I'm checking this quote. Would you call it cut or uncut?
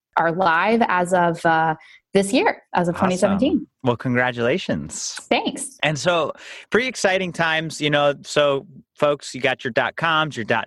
uncut